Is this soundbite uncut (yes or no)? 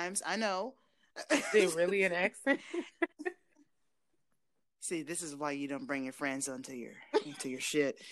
yes